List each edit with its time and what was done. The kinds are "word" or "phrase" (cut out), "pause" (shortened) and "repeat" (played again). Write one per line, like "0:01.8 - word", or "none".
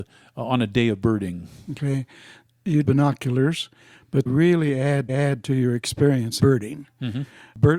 0:02.8 - phrase
0:04.3 - word
0:05.1 - repeat
0:06.4 - word